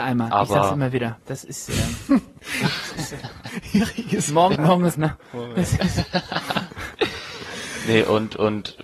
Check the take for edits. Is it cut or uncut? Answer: cut